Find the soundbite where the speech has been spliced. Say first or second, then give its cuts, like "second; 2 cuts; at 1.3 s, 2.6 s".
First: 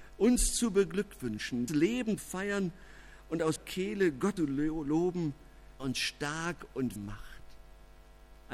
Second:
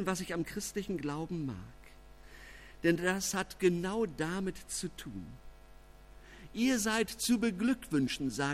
first; 6 cuts; at 1.7 s, 2.2 s, 3.6 s, 4.4 s, 5.8 s, 7.0 s